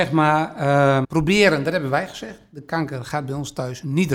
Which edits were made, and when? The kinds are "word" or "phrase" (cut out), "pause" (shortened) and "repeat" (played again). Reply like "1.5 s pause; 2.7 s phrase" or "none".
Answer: 1.0 s word